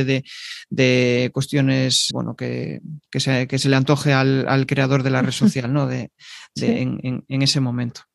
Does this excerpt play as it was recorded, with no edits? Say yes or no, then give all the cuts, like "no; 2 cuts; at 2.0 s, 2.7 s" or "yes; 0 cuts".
no; 1 cut; at 2.1 s